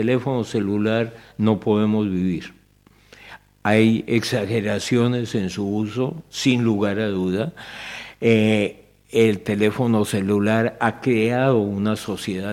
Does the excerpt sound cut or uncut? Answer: uncut